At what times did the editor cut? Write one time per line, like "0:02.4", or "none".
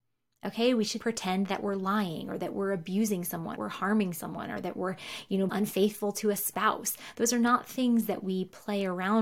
0:01.0
0:03.6
0:05.5